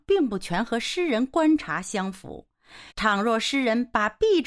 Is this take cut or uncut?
cut